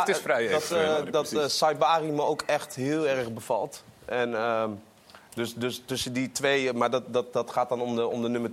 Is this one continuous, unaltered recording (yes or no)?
yes